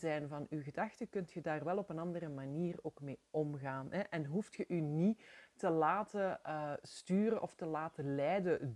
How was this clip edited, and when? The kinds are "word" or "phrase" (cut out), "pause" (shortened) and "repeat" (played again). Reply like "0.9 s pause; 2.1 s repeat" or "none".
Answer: none